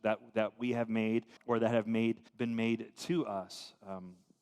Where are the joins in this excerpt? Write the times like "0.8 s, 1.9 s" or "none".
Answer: 1.4 s, 2.3 s